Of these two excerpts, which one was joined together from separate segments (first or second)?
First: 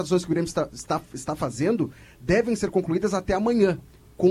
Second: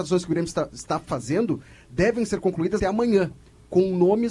second